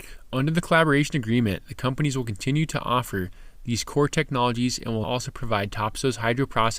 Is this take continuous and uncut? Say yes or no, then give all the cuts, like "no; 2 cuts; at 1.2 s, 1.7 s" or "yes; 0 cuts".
no; 1 cut; at 5.0 s